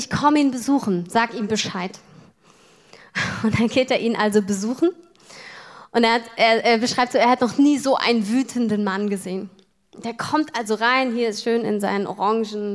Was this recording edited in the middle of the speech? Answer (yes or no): no